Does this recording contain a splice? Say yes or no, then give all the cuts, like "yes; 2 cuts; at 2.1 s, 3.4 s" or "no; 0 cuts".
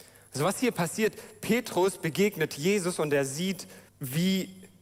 yes; 1 cut; at 3.9 s